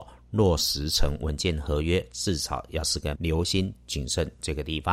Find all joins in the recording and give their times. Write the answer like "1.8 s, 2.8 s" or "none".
3.1 s